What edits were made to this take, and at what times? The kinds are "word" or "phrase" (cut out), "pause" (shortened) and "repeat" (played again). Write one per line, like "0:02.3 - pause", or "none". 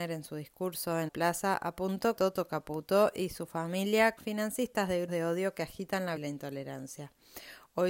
0:01.1 - word
0:02.2 - word
0:04.2 - word
0:05.1 - word
0:06.2 - word